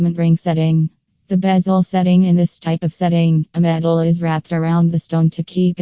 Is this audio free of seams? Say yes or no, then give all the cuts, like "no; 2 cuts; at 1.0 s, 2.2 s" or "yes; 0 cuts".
yes; 0 cuts